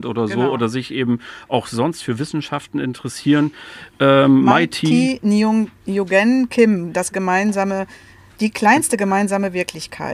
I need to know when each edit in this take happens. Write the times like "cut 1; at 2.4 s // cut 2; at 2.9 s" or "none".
cut 1; at 7.1 s